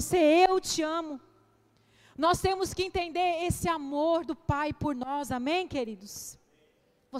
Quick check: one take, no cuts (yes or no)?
yes